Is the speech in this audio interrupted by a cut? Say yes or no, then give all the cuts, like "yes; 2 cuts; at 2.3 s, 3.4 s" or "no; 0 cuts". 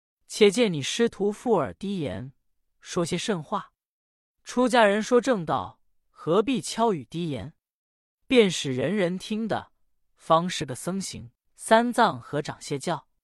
yes; 1 cut; at 11.4 s